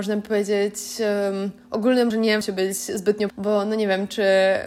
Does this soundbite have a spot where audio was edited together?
yes; 3 cuts; at 2.1 s, 2.4 s, 3.3 s

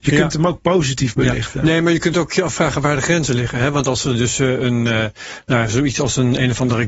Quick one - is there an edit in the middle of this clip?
no; 0 cuts

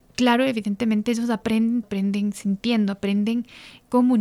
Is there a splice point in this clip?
yes; 1 cut; at 1.8 s

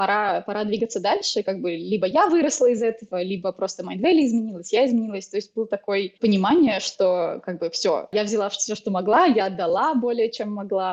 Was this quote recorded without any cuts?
no; 1 cut; at 6.2 s

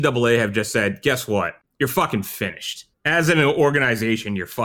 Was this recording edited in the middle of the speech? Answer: no; 0 cuts

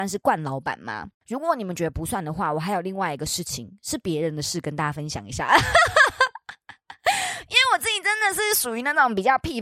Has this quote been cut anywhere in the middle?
yes; 1 cut; at 1.2 s

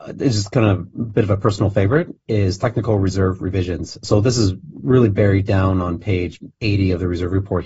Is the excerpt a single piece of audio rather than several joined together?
yes; 0 cuts

